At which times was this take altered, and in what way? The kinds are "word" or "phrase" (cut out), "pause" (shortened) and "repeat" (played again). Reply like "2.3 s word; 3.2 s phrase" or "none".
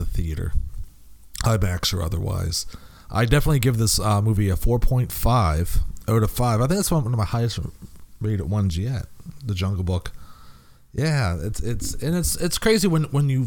none